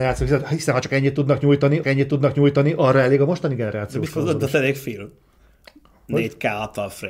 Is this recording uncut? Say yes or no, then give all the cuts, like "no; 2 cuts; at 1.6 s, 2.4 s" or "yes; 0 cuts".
no; 1 cut; at 1.8 s